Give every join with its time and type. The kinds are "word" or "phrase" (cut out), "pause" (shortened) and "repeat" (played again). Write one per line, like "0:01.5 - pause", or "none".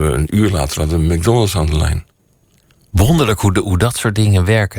0:02.3 - pause